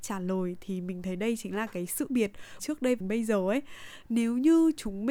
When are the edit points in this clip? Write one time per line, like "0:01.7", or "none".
0:02.1
0:02.6
0:03.0